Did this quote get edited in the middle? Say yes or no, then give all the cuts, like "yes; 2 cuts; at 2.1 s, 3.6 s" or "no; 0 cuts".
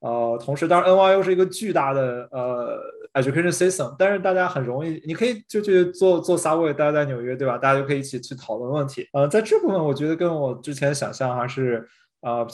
yes; 1 cut; at 9.1 s